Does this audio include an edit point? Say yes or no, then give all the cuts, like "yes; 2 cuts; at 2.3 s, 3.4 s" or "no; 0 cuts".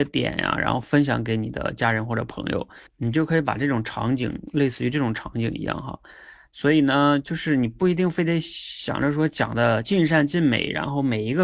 yes; 1 cut; at 2.9 s